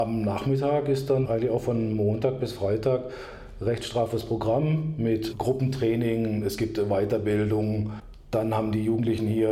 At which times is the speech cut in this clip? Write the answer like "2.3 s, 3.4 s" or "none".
1.2 s, 5.3 s